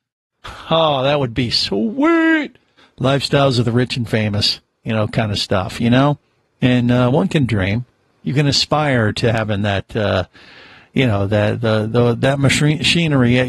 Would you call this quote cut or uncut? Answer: uncut